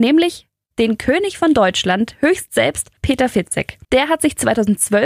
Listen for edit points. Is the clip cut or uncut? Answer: cut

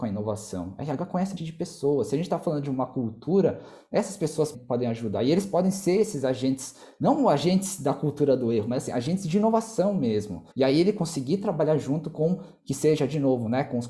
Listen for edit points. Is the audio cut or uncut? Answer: cut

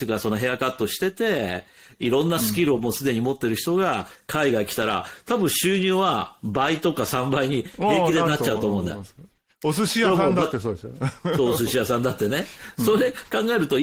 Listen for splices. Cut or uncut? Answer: uncut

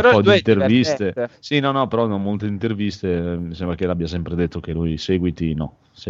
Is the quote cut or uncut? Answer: uncut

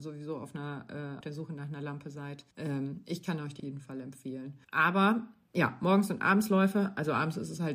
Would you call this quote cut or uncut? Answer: cut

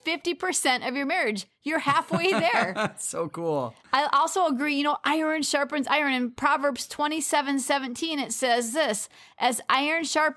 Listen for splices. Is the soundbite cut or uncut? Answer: uncut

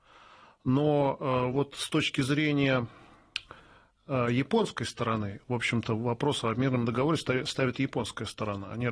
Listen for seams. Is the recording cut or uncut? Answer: uncut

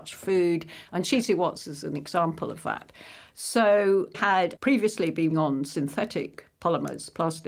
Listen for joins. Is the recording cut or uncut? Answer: cut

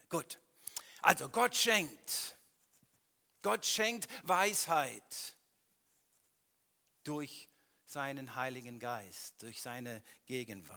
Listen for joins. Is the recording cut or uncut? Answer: uncut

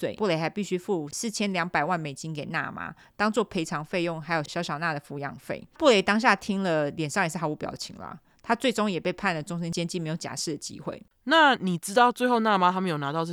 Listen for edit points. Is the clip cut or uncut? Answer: uncut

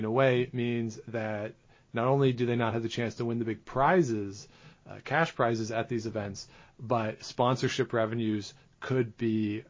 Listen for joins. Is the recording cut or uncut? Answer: uncut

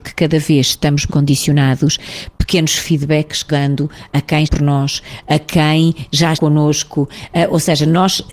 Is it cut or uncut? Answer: cut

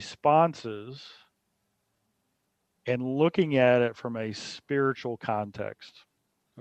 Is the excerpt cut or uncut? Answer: uncut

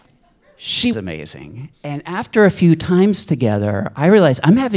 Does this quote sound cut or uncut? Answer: cut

